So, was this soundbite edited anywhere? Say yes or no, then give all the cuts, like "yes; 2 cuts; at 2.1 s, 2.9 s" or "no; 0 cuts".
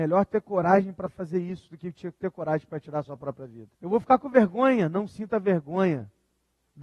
yes; 1 cut; at 3.7 s